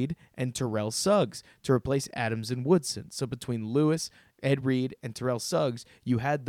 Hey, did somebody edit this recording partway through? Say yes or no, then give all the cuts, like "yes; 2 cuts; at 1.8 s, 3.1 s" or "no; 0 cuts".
no; 0 cuts